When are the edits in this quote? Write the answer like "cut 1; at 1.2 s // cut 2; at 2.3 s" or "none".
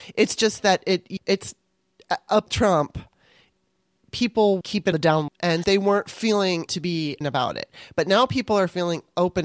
cut 1; at 1.2 s // cut 2; at 2.5 s // cut 3; at 4.6 s // cut 4; at 4.9 s // cut 5; at 5.3 s // cut 6; at 5.6 s // cut 7; at 6.7 s // cut 8; at 7.2 s